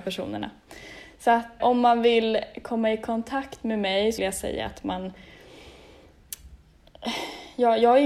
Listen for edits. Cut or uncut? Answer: cut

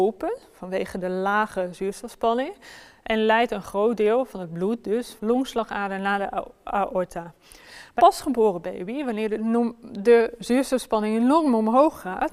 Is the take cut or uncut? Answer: cut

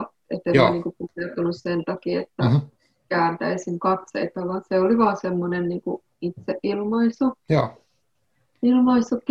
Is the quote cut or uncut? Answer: uncut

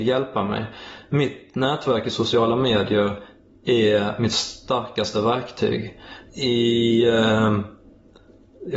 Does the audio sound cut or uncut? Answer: cut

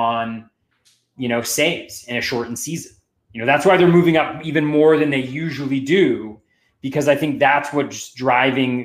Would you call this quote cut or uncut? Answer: uncut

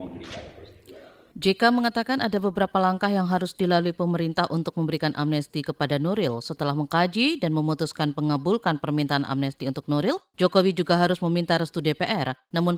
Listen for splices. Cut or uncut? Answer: uncut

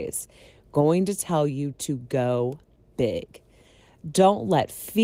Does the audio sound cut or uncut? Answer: uncut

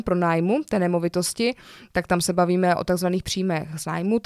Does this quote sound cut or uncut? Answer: uncut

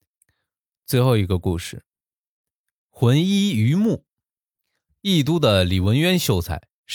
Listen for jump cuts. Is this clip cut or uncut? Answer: uncut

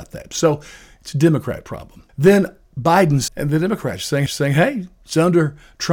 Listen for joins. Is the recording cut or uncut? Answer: cut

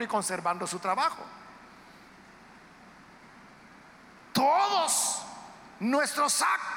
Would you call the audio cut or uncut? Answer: uncut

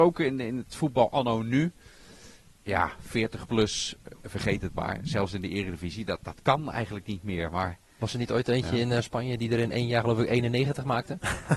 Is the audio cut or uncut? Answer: cut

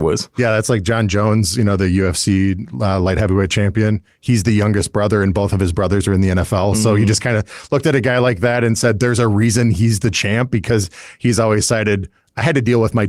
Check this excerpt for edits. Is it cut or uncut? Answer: uncut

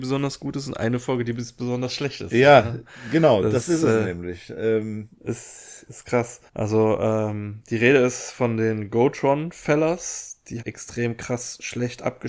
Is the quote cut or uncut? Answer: cut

